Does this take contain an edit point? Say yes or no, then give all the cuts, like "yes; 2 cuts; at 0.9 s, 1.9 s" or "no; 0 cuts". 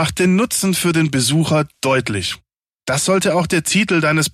no; 0 cuts